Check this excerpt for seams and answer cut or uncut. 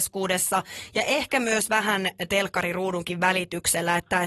uncut